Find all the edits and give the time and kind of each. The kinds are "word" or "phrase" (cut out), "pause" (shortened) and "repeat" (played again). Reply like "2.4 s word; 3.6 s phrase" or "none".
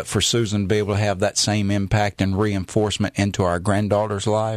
none